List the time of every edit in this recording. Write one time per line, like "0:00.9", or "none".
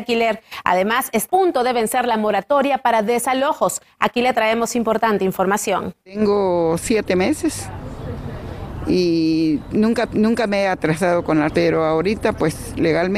0:01.3
0:06.0
0:10.1
0:11.5